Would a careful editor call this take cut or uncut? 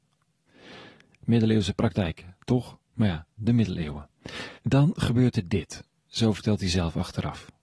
cut